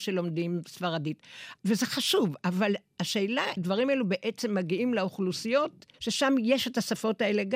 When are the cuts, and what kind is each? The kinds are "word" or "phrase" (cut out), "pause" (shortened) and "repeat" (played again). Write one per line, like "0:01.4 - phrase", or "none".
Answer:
0:03.6 - word
0:05.9 - pause